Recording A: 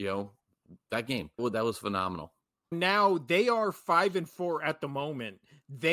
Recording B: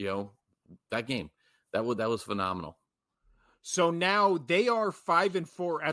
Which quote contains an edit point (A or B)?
A